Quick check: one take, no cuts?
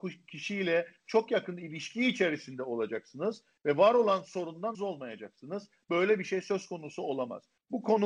no; 1 cut; at 4.7 s

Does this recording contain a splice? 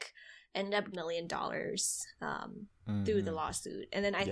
yes; 1 cut; at 0.9 s

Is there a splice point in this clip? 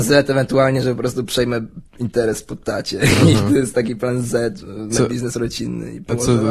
yes; 1 cut; at 4.9 s

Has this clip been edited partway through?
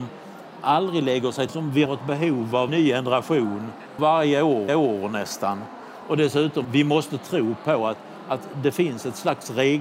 yes; 6 cuts; at 1.5 s, 1.9 s, 2.7 s, 4.0 s, 4.7 s, 6.6 s

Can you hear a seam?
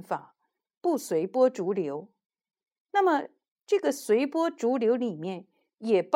no; 0 cuts

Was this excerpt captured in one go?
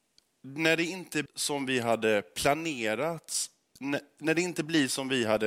no; 1 cut; at 1.3 s

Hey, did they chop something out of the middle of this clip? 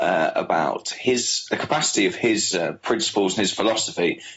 yes; 1 cut; at 1.5 s

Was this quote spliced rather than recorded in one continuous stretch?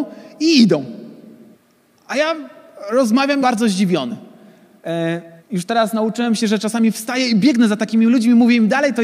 yes; 3 cuts; at 1.5 s, 3.4 s, 5.4 s

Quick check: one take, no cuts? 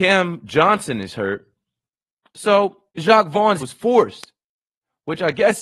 no; 2 cuts; at 2.9 s, 3.6 s

